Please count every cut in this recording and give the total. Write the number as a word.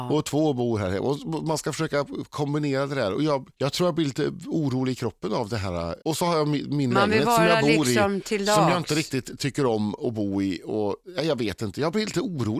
two